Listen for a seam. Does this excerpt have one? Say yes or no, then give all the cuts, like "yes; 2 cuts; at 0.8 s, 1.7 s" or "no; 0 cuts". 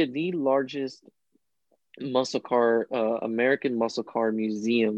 no; 0 cuts